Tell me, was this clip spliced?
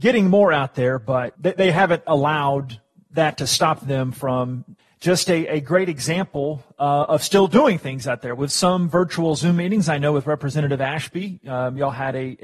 no; 0 cuts

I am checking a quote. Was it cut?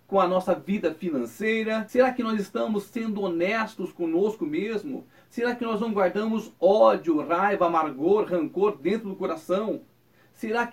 no; 0 cuts

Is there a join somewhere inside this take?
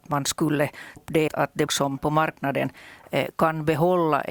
yes; 4 cuts; at 1.0 s, 1.3 s, 1.7 s, 2.0 s

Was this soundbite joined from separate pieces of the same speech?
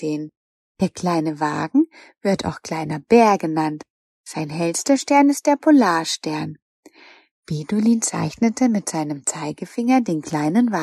no; 0 cuts

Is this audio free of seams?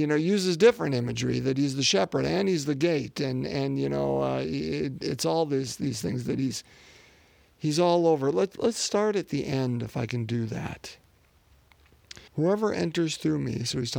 no; 1 cut; at 12.3 s

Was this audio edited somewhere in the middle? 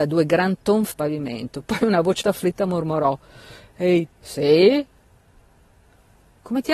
yes; 3 cuts; at 0.9 s, 2.2 s, 4.1 s

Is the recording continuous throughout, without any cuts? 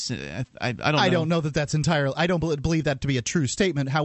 yes; 0 cuts

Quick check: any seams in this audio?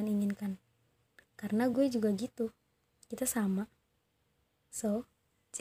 no; 0 cuts

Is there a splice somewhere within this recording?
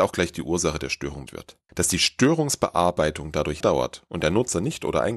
yes; 3 cuts; at 1.3 s, 1.7 s, 3.6 s

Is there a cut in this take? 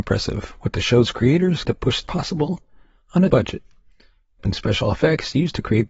yes; 4 cuts; at 1.6 s, 2.0 s, 3.3 s, 4.4 s

